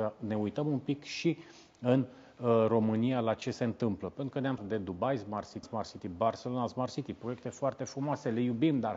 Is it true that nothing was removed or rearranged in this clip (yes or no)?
no